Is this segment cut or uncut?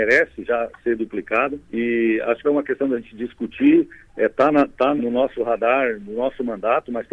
cut